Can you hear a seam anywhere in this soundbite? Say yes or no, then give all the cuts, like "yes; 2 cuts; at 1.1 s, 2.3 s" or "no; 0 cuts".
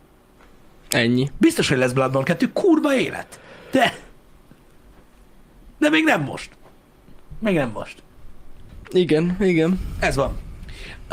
yes; 1 cut; at 5.7 s